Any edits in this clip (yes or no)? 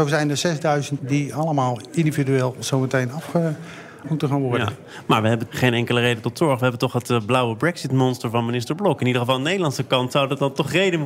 yes